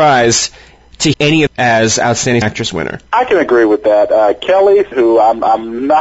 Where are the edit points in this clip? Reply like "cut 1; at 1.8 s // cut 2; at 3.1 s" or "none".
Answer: cut 1; at 1.1 s // cut 2; at 1.5 s // cut 3; at 2.4 s // cut 4; at 3.1 s // cut 5; at 4.9 s